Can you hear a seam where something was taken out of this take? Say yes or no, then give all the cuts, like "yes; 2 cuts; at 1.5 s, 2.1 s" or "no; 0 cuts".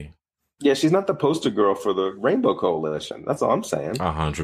no; 0 cuts